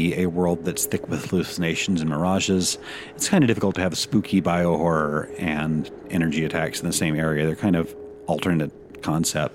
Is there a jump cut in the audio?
no; 0 cuts

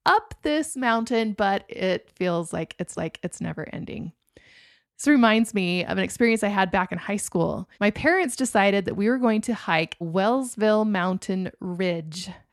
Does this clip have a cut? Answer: yes; 3 cuts; at 2.9 s, 7.7 s, 10.0 s

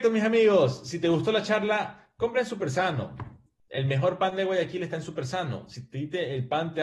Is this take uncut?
yes; 0 cuts

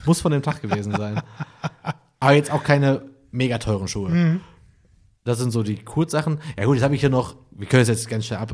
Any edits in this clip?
no; 0 cuts

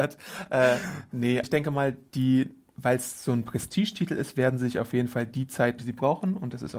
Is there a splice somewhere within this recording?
yes; 2 cuts; at 1.4 s, 5.8 s

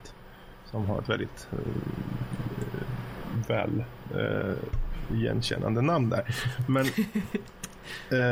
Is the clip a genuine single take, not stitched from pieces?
yes; 0 cuts

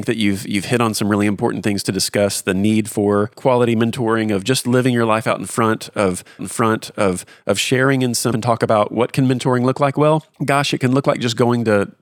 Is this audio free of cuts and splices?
no; 3 cuts; at 6.4 s, 8.3 s, 10.3 s

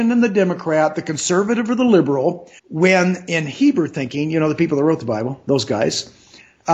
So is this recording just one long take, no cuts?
no; 1 cut; at 2.6 s

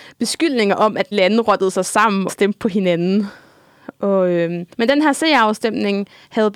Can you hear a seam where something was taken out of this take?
yes; 3 cuts; at 1.1 s, 2.3 s, 4.7 s

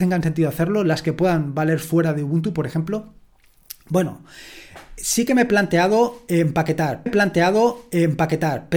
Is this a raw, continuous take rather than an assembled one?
no; 1 cut; at 7.1 s

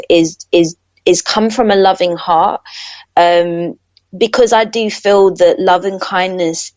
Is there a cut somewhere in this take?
no; 0 cuts

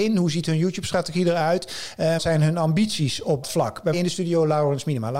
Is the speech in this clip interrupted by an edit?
yes; 3 cuts; at 2.2 s, 3.4 s, 3.9 s

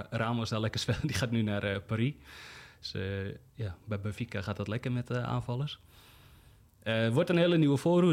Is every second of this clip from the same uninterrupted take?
yes; 0 cuts

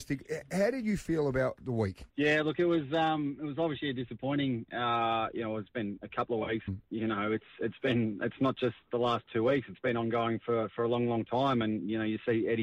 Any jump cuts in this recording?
yes; 2 cuts; at 2.1 s, 6.7 s

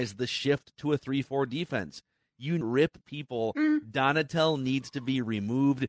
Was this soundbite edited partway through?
yes; 2 cuts; at 2.6 s, 3.0 s

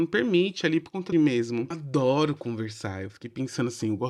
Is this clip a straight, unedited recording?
no; 2 cuts; at 1.1 s, 1.7 s

